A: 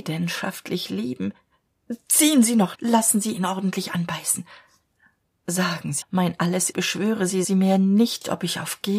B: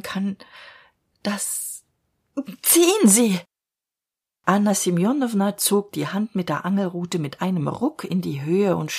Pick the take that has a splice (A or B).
A